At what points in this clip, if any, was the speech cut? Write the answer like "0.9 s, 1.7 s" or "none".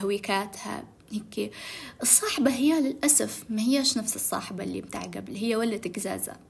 none